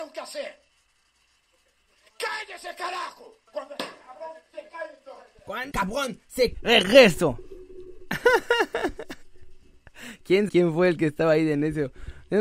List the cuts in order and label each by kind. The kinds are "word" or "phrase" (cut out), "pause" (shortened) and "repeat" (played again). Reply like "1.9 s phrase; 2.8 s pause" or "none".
1.0 s pause; 3.5 s pause; 5.7 s word; 6.5 s word; 10.5 s word